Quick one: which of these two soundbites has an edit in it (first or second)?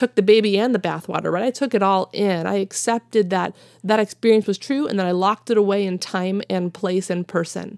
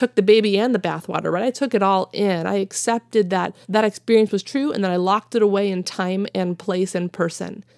second